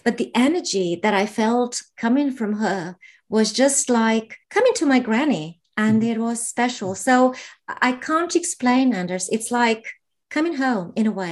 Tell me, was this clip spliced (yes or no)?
yes